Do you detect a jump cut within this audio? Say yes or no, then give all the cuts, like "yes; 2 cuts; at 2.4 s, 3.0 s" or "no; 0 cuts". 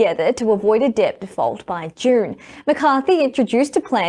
no; 0 cuts